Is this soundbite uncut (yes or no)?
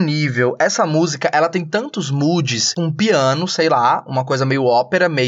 no